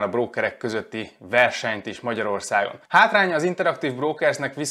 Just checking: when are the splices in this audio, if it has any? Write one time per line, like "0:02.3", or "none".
0:02.9

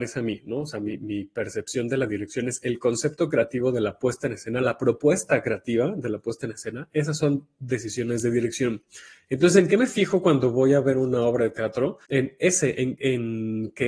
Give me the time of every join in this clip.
0:12.0

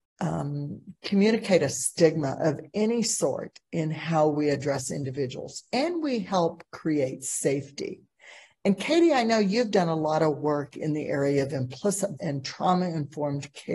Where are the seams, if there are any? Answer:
0:12.2

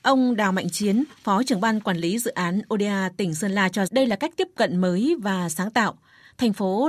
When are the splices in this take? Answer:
0:03.9

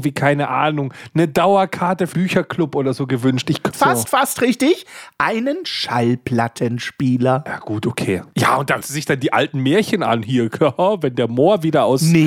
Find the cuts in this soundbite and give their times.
0:02.1
0:03.7
0:04.0
0:08.8

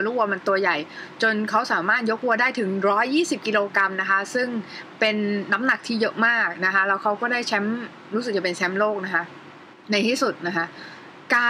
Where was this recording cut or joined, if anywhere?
0:09.7

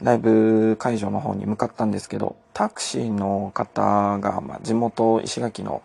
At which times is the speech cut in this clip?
0:02.4

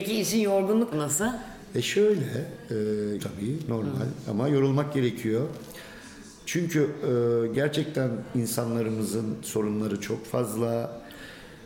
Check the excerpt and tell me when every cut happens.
0:00.9
0:03.2

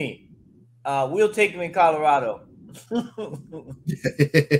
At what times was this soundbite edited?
none

